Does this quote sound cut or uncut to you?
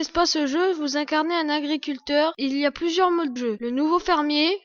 cut